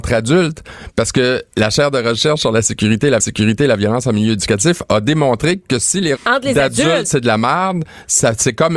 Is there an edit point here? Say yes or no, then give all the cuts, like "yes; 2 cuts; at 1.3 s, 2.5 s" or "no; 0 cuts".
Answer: yes; 3 cuts; at 1.5 s, 3.2 s, 6.2 s